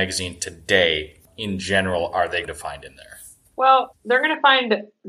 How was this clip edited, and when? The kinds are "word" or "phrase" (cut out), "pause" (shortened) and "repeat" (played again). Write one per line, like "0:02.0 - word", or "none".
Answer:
0:01.3 - word
0:02.4 - word

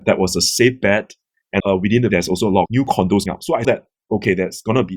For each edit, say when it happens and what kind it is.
0:01.6 - word
0:02.1 - word
0:02.7 - word
0:03.3 - word
0:03.6 - word

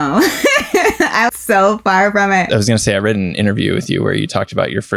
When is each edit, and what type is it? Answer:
0:01.3 - word

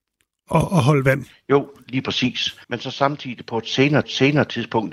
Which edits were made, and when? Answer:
0:02.6 - pause
0:04.0 - repeat

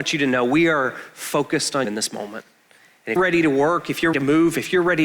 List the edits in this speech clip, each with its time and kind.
0:01.8 - word
0:03.2 - word
0:04.1 - word

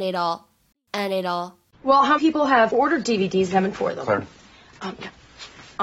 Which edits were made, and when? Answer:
0:02.2 - word
0:03.7 - word

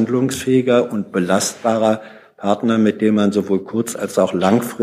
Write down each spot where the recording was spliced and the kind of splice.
none

